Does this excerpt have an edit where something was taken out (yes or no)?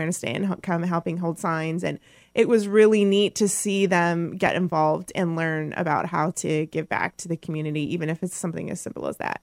no